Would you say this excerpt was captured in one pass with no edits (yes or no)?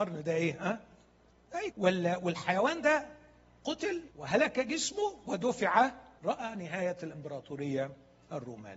no